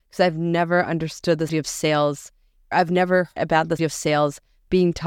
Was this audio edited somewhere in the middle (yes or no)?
yes